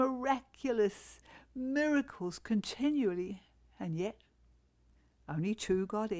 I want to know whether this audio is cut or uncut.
uncut